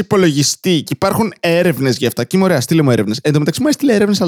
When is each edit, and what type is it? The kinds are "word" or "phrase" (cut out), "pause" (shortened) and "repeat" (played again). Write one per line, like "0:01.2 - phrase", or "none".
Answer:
none